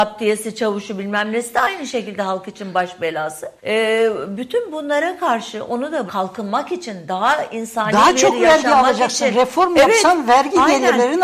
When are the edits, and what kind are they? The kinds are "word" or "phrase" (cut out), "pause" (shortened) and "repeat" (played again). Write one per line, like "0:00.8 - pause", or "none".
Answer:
0:03.6 - pause
0:06.1 - word